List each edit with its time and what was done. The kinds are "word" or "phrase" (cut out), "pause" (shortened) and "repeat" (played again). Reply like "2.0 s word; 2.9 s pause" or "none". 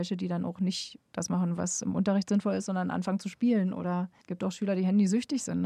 4.2 s pause

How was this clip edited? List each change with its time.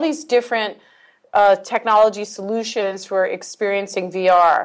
none

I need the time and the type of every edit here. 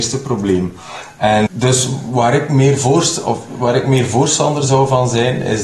1.5 s word

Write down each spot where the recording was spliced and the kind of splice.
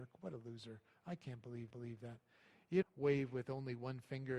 1.7 s repeat; 2.8 s word

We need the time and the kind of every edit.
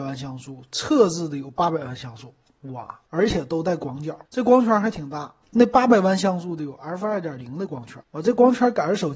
3.1 s pause; 4.3 s pause; 5.4 s pause; 8.0 s pause

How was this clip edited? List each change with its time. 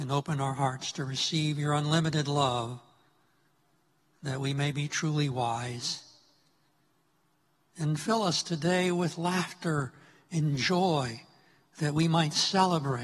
none

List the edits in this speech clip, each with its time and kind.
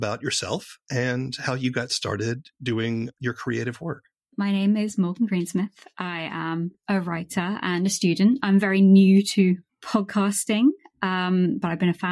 2.5 s pause

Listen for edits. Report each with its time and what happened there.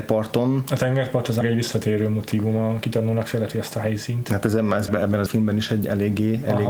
1.4 s word; 4.9 s word; 5.3 s word

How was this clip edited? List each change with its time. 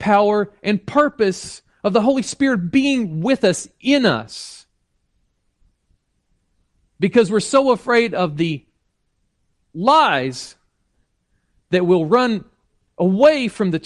none

